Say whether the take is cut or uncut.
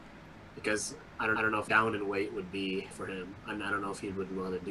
cut